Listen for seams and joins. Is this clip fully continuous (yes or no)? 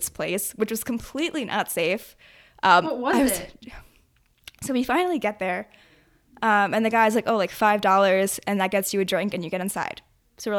yes